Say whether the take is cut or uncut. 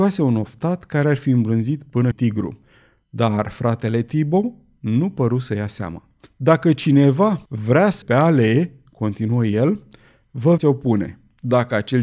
cut